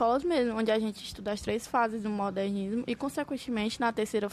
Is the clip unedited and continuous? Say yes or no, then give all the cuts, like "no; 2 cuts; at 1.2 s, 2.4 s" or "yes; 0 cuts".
yes; 0 cuts